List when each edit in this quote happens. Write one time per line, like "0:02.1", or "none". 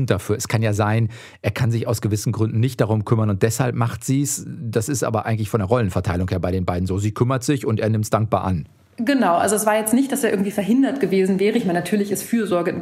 none